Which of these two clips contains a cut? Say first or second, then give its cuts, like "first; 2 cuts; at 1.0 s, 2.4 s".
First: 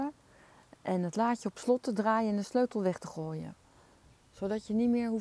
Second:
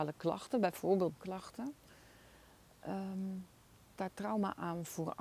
second; 2 cuts; at 1.2 s, 4.0 s